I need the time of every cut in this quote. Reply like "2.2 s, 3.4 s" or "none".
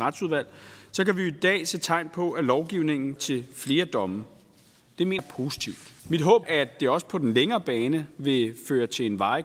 3.2 s, 5.2 s, 6.0 s, 6.4 s